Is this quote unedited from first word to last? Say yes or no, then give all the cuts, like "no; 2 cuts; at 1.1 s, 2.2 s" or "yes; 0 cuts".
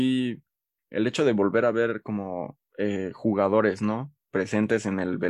no; 1 cut; at 2.7 s